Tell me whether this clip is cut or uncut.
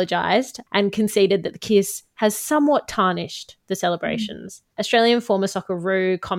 cut